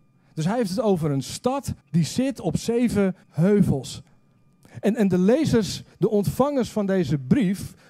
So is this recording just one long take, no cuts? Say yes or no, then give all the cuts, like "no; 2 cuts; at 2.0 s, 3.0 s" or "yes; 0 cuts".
no; 2 cuts; at 1.8 s, 3.2 s